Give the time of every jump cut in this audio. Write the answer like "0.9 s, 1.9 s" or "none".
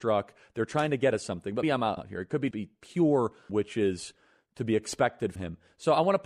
1.1 s, 1.6 s, 2.0 s, 2.5 s, 3.5 s, 5.4 s